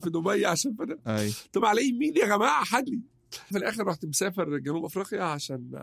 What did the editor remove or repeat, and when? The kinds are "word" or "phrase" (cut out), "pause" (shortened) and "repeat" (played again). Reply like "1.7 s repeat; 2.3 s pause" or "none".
1.6 s word; 2.9 s word; 3.5 s word